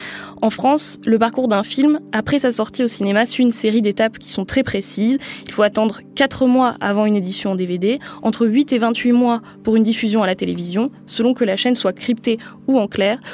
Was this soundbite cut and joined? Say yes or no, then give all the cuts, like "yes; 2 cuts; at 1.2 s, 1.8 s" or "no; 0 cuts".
no; 0 cuts